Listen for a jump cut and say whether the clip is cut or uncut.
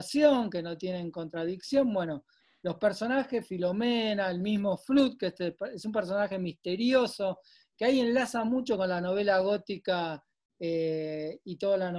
uncut